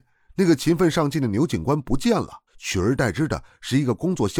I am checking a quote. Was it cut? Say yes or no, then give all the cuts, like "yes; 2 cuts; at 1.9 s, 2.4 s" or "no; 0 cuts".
yes; 1 cut; at 2.5 s